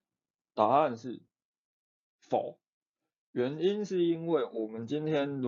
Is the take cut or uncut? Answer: uncut